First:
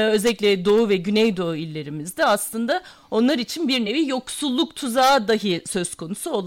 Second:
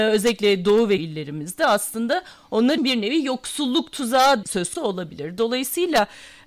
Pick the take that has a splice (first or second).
second